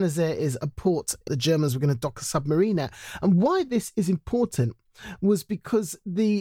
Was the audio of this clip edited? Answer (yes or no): yes